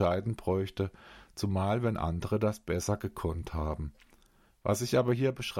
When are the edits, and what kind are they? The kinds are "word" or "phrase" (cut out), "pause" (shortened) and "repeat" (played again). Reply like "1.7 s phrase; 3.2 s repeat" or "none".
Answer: none